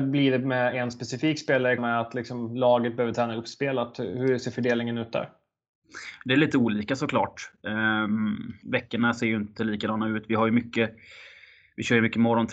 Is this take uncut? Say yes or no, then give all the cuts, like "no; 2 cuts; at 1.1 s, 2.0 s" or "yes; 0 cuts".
no; 2 cuts; at 1.8 s, 8.6 s